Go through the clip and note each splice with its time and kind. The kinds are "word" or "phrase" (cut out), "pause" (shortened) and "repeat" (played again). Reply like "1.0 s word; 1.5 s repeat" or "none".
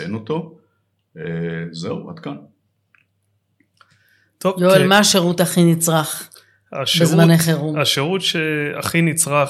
none